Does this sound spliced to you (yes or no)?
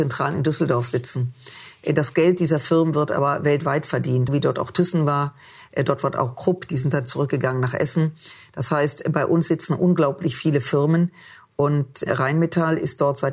yes